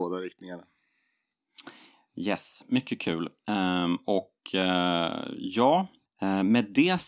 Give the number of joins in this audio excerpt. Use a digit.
0